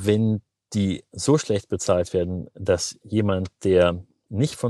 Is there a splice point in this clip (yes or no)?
no